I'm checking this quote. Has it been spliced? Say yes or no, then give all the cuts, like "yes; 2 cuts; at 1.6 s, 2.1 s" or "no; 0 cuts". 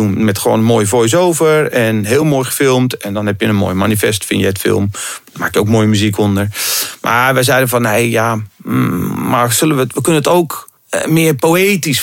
no; 0 cuts